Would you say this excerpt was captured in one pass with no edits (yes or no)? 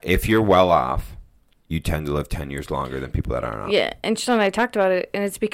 yes